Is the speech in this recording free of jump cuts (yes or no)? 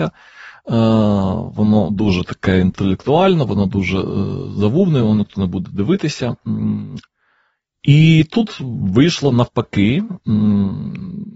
yes